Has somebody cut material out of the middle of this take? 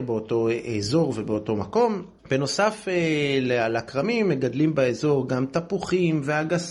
yes; 1 cut; at 2.2 s

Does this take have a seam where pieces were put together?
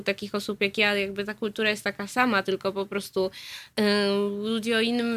yes; 1 cut; at 3.7 s

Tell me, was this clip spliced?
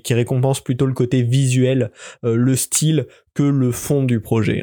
no; 0 cuts

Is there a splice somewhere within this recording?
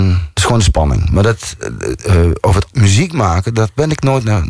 yes; 1 cut; at 2.7 s

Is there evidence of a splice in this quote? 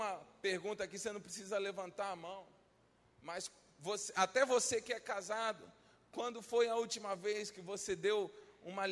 no; 0 cuts

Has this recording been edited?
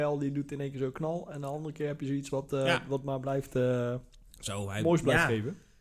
no; 0 cuts

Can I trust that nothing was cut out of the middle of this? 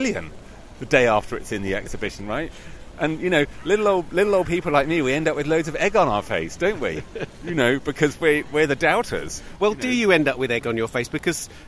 yes; 0 cuts

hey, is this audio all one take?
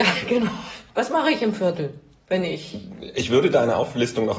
yes; 0 cuts

